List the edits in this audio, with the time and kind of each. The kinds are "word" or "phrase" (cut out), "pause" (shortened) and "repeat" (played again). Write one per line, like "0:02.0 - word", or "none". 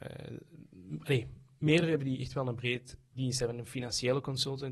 0:02.0 - word
0:03.1 - word